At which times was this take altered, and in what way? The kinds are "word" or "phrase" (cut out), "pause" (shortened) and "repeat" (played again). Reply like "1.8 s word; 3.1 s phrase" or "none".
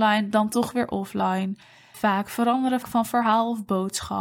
1.9 s word; 2.8 s word